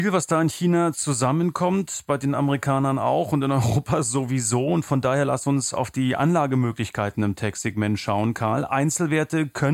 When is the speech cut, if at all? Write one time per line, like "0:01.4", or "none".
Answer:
none